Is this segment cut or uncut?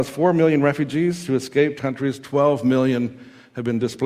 cut